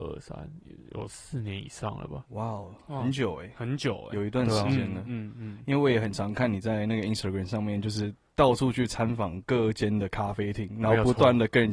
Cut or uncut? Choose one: uncut